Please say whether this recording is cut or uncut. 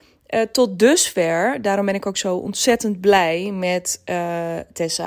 uncut